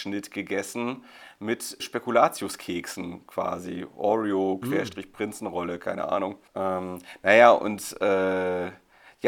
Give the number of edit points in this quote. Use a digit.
2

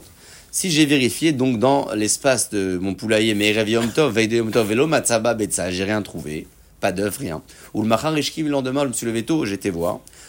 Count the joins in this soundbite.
0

